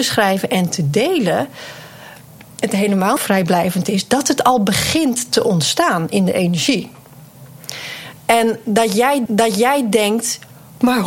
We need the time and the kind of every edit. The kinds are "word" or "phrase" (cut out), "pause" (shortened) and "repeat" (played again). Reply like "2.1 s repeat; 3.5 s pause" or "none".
3.2 s phrase; 9.3 s repeat